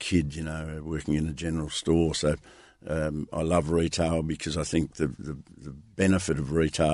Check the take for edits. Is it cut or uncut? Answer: uncut